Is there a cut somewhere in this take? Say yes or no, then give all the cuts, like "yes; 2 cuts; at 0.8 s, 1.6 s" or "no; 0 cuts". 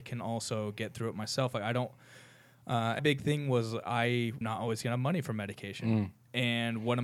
yes; 2 cuts; at 3.0 s, 4.4 s